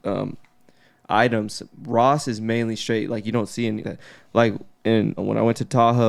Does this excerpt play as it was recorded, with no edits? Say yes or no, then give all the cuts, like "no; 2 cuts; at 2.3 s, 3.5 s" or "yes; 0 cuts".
no; 2 cuts; at 3.8 s, 5.2 s